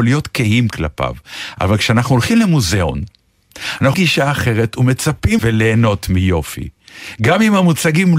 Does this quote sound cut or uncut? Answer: cut